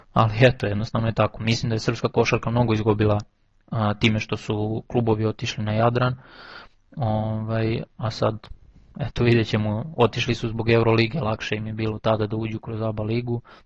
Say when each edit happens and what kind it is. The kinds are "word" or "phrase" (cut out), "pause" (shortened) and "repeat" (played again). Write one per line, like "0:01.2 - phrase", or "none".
none

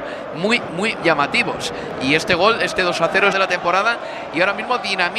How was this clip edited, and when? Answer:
0:01.0 - word
0:03.3 - phrase

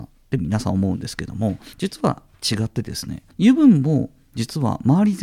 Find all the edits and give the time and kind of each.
0:01.7 - pause
0:03.3 - pause

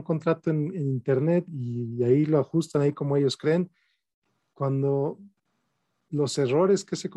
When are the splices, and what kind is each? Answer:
0:01.5 - word

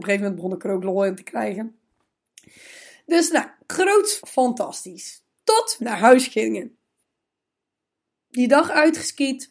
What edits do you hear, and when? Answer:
0:04.2 - word
0:05.8 - word

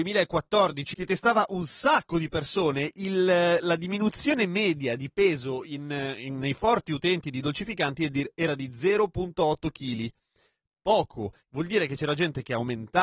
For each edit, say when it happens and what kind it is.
0:11.4 - pause

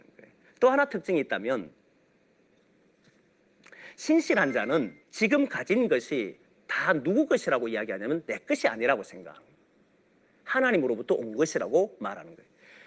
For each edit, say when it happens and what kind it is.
0:05.0 - pause

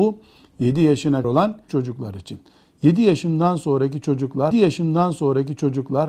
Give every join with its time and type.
0:01.2 - word
0:01.7 - word
0:04.5 - repeat

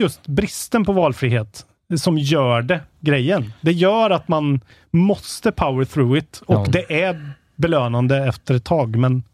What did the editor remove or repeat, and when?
none

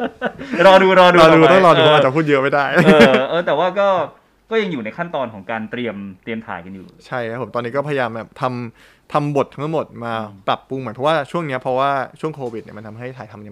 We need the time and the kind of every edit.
none

